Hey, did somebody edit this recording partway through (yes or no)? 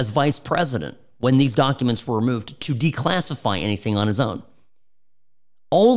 no